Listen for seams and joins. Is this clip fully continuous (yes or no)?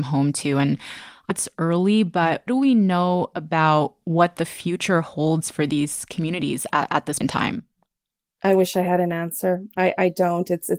no